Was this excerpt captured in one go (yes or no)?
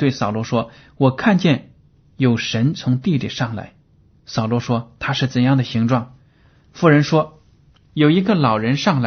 yes